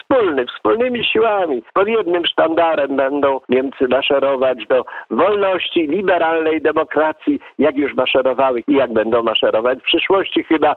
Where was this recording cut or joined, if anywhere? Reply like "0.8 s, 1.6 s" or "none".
1.7 s, 3.4 s, 8.6 s, 9.8 s